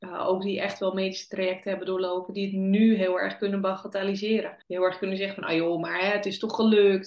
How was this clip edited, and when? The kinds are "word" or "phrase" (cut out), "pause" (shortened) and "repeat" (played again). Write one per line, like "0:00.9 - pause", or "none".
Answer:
0:04.6 - pause